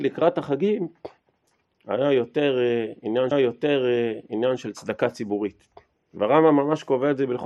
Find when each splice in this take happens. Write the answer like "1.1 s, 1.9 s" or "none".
3.3 s, 6.0 s